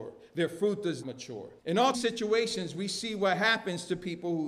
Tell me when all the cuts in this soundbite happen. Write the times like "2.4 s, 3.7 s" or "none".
1.0 s, 1.6 s, 1.9 s